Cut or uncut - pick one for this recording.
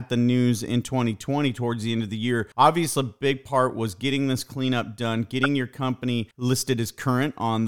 cut